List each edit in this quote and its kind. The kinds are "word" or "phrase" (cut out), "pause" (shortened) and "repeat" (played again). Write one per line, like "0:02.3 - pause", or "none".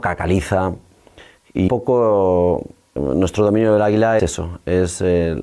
0:01.7 - word
0:03.0 - word
0:04.2 - word